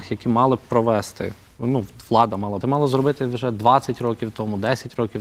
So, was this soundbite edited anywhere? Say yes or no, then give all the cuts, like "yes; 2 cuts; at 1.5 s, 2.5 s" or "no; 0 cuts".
yes; 1 cut; at 2.6 s